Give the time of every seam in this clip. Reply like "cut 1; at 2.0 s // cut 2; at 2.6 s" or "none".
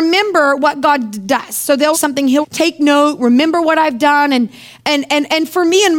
cut 1; at 1.9 s // cut 2; at 2.4 s

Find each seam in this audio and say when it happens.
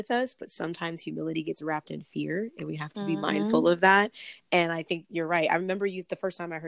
none

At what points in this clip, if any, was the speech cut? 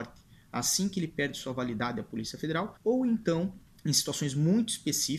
cut 1; at 2.8 s // cut 2; at 3.7 s

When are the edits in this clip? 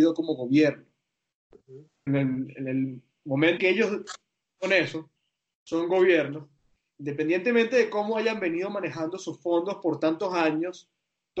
cut 1; at 2.1 s // cut 2; at 3.6 s

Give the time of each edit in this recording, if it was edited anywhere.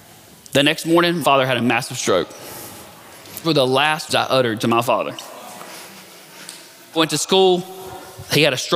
cut 1; at 1.2 s // cut 2; at 3.4 s // cut 3; at 4.1 s // cut 4; at 7.0 s

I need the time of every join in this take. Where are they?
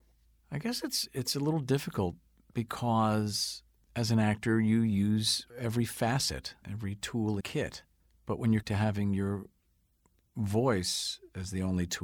cut 1; at 6.6 s // cut 2; at 7.4 s // cut 3; at 8.6 s

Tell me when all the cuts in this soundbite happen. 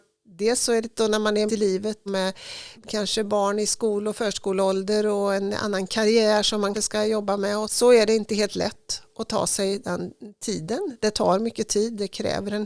cut 1; at 0.9 s // cut 2; at 1.5 s // cut 3; at 2.1 s // cut 4; at 2.8 s // cut 5; at 6.7 s // cut 6; at 7.6 s

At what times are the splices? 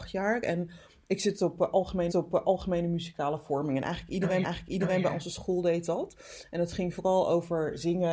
cut 1; at 2.1 s // cut 2; at 4.4 s

